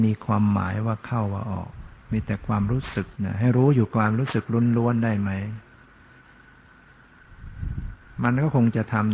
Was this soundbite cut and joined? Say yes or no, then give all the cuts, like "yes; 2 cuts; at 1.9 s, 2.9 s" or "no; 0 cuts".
yes; 1 cut; at 3.1 s